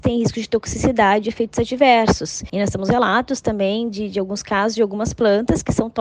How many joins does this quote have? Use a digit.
0